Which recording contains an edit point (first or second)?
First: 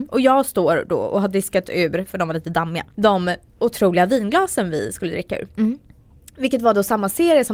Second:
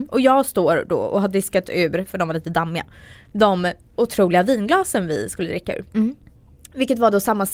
first